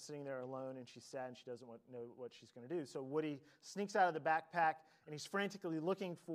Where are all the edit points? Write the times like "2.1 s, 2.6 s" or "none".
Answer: none